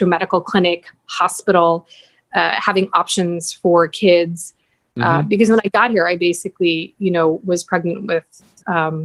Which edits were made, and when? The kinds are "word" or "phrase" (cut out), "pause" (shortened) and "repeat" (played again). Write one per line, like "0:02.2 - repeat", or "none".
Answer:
none